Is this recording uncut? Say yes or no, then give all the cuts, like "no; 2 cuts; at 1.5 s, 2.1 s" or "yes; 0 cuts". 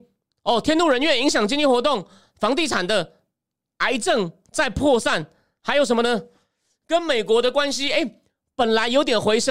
yes; 0 cuts